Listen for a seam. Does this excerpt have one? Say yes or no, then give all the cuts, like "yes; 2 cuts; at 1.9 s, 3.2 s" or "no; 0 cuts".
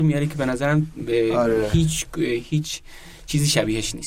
no; 0 cuts